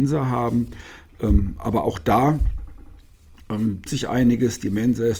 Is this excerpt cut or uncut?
cut